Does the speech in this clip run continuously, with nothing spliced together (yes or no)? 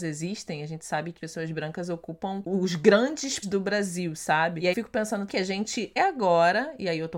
no